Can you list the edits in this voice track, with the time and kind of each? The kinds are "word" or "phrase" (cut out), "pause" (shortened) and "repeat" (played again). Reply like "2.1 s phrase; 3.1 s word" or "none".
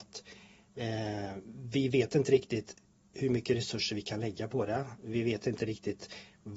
none